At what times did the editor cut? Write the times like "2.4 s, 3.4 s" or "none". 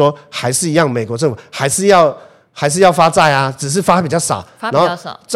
none

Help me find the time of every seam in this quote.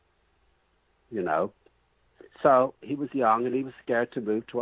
none

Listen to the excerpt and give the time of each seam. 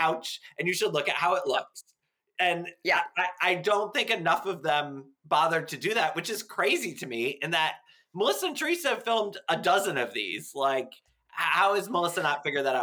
none

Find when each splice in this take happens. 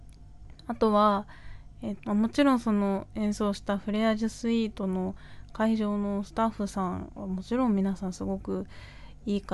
2.0 s

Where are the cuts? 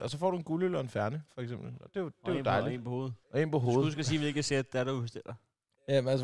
3.2 s

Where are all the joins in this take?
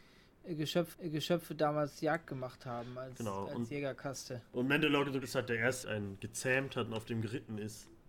0.9 s, 4.5 s, 5.2 s, 5.8 s

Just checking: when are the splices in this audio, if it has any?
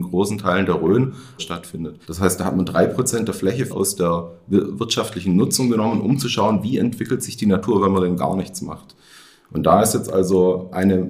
1.4 s, 2.0 s, 3.7 s

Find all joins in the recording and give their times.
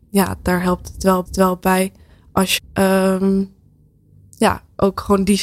1.3 s, 2.6 s

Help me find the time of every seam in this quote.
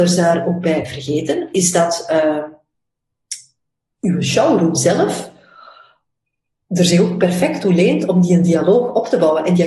none

